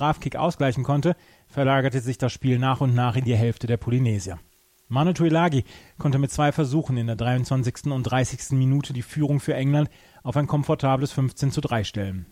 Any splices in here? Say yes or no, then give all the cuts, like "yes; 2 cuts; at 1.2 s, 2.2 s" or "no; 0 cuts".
no; 0 cuts